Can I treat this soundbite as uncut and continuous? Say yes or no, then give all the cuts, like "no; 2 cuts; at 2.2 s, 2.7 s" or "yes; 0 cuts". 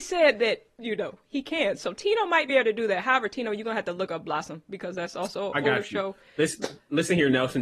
yes; 0 cuts